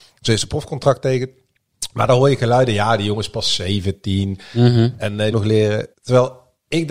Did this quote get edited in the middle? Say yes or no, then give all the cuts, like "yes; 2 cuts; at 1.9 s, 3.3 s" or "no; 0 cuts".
yes; 2 cuts; at 5.3 s, 5.9 s